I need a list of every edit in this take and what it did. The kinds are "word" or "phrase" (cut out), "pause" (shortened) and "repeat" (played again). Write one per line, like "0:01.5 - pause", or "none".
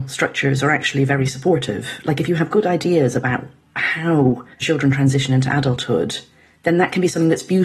0:04.5 - pause
0:06.4 - pause

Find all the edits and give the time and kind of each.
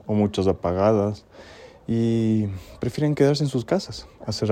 none

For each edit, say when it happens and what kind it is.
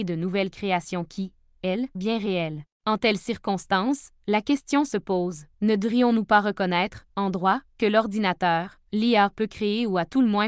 0:01.9 - word
0:02.7 - pause
0:05.5 - pause
0:08.9 - pause

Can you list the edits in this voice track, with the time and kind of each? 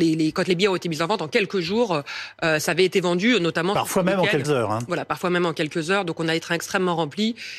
0:04.4 - word

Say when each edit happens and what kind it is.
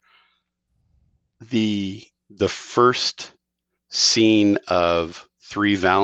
none

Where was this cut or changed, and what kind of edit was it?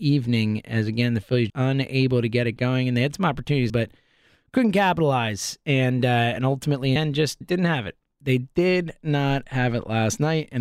0:01.5 - word
0:03.7 - word
0:07.0 - phrase
0:07.4 - word

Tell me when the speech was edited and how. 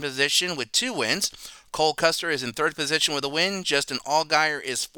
none

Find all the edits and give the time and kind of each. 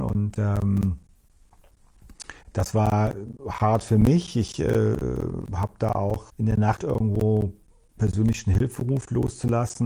0:02.4 - pause
0:06.3 - word
0:06.8 - word
0:08.0 - word

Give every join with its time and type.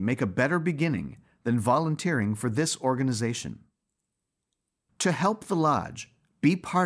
none

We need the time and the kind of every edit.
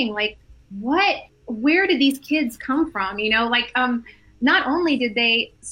0:01.3 - pause

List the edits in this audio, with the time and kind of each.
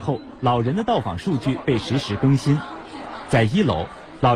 none

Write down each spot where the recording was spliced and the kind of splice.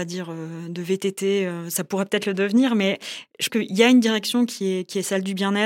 0:03.5 - word

